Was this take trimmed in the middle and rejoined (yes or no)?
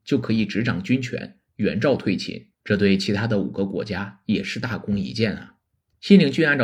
yes